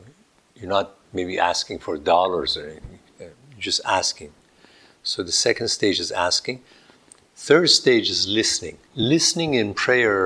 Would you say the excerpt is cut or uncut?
cut